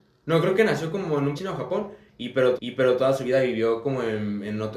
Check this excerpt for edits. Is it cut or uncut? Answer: cut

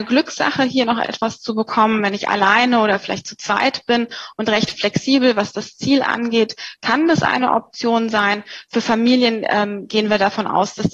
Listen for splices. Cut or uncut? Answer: uncut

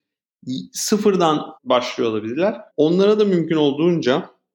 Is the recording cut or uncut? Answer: cut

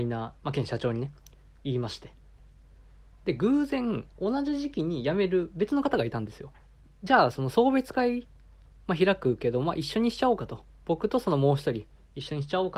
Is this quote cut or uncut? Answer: cut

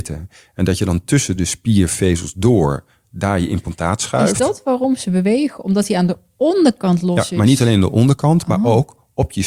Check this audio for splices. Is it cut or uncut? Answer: uncut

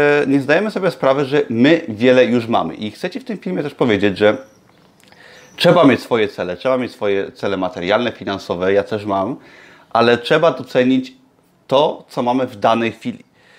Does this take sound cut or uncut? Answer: uncut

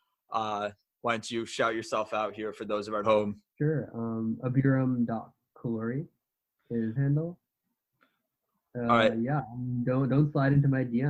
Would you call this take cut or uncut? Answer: cut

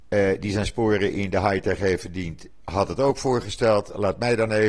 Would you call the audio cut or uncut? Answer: uncut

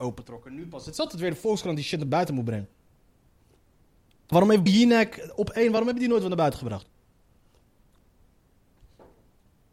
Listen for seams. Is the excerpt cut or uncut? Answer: cut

